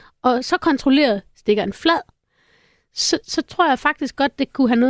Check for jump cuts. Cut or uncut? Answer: uncut